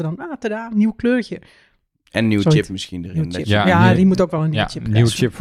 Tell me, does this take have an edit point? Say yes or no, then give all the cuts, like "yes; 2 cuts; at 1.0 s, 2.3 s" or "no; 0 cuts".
no; 0 cuts